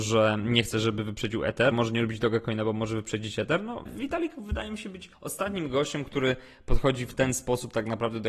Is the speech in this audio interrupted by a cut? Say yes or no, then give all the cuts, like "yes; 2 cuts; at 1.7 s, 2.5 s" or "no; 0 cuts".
yes; 3 cuts; at 1.7 s, 3.9 s, 5.1 s